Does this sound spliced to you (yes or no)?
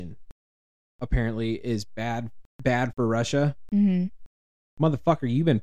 yes